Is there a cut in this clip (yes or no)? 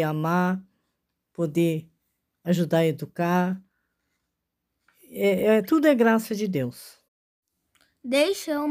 no